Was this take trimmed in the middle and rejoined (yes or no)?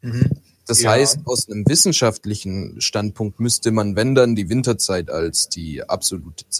no